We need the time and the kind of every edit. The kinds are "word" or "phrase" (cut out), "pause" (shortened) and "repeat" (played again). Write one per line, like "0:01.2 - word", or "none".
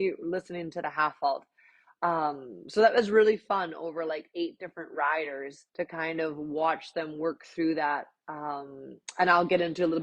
0:05.7 - pause